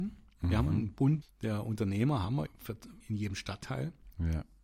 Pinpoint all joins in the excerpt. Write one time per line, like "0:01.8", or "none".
0:01.2
0:02.5
0:03.0